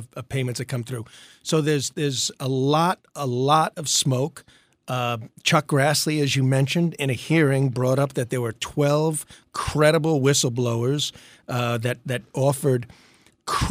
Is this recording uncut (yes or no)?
yes